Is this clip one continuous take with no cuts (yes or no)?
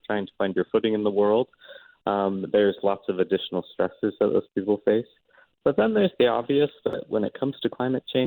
yes